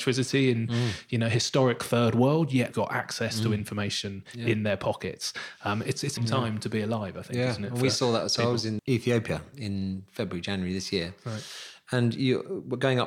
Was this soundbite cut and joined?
yes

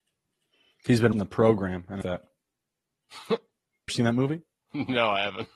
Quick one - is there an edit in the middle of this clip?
yes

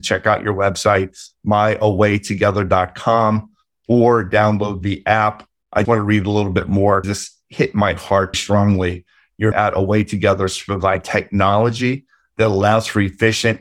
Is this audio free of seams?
no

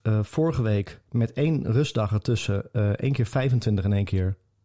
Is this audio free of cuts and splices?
no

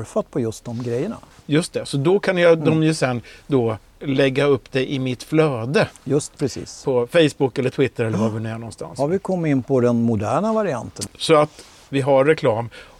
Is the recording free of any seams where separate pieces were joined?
yes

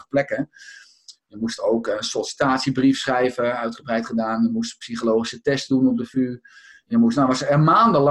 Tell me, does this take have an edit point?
no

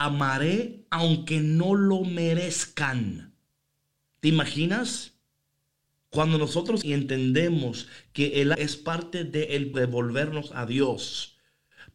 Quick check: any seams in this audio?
yes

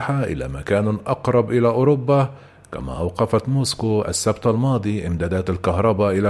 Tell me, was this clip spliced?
no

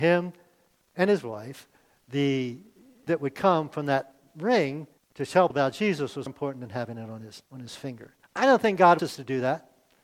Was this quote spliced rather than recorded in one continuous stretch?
yes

